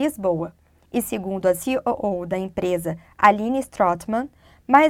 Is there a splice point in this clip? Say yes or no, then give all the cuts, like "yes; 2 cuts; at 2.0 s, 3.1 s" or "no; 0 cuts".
no; 0 cuts